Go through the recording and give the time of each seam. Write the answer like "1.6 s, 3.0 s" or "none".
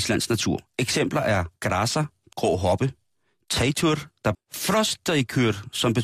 1.6 s, 2.3 s, 4.3 s